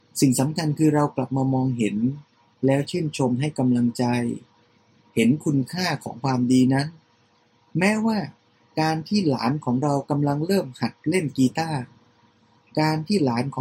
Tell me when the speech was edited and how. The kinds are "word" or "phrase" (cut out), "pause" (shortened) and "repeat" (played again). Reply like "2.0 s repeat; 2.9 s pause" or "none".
none